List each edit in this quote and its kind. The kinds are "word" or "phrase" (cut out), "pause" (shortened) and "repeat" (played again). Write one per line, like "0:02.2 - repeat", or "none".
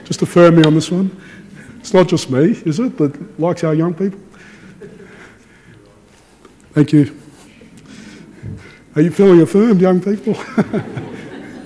none

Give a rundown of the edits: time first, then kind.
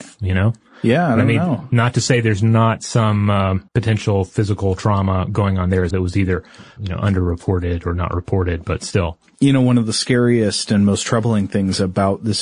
0:03.7 - pause
0:05.9 - word
0:06.8 - word

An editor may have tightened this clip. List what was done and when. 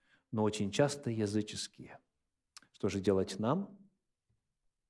0:02.3 - pause

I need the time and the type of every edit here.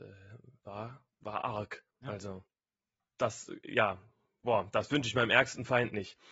0:01.1 - pause
0:01.9 - pause
0:02.8 - pause

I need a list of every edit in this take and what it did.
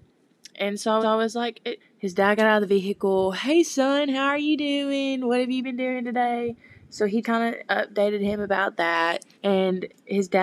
0:01.0 - repeat
0:01.8 - phrase
0:07.2 - word
0:09.3 - pause

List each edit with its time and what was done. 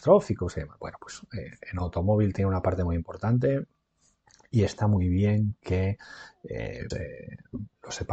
0:06.9 - word

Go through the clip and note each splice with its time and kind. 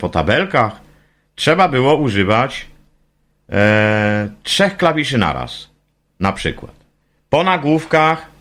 none

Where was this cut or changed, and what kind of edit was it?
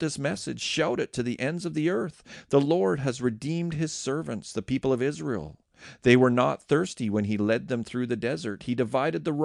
none

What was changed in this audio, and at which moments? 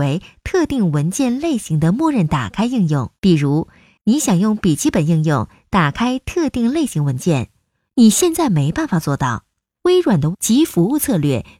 0:03.2 - pause
0:10.3 - word

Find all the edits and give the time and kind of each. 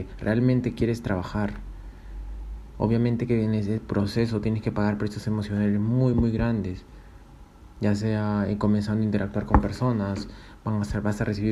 none

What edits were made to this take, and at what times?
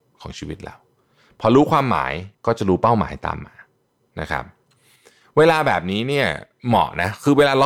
0:02.3 - pause

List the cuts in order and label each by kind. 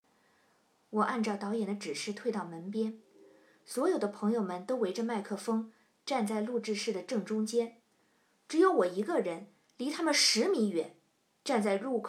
none

